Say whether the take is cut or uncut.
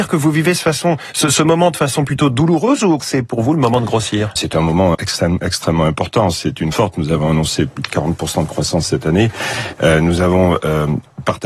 cut